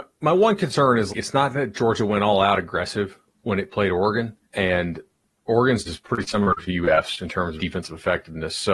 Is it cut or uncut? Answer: cut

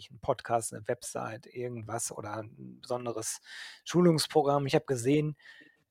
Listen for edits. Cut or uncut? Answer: uncut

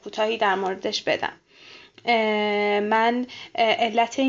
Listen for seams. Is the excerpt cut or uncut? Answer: uncut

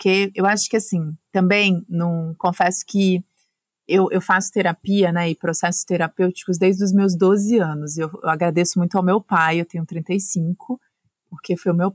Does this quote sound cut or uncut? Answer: uncut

